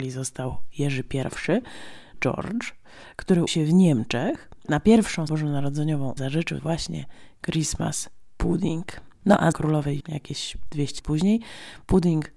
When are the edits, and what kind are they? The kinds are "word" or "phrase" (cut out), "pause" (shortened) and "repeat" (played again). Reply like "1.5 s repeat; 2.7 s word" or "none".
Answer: 2.1 s word; 3.5 s word; 5.3 s word; 6.2 s word; 6.6 s word; 9.5 s word; 10.0 s word; 11.0 s word